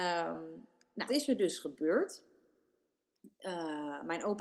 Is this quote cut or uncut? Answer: cut